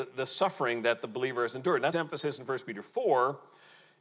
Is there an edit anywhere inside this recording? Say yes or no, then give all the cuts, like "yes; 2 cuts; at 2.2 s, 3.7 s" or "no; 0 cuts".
yes; 1 cut; at 1.9 s